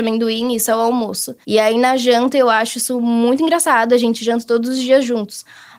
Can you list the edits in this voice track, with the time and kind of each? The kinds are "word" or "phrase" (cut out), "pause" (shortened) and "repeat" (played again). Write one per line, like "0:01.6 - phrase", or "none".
0:01.4 - pause

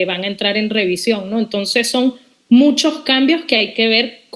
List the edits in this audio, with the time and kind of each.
none

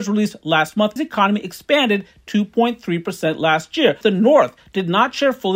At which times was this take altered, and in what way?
0:01.0 - phrase
0:04.0 - word

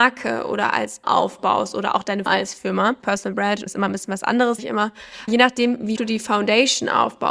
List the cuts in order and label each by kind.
0:01.0 - word
0:02.3 - word
0:03.0 - word
0:03.7 - word
0:04.6 - word
0:05.3 - word
0:06.0 - word

